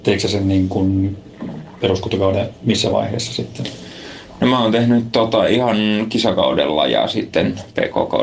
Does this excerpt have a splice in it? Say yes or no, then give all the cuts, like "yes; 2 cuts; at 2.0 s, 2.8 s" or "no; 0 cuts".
no; 0 cuts